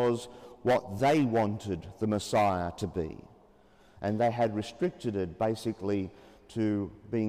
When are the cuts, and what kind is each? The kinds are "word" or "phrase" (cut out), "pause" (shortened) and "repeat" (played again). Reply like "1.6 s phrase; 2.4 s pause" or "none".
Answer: none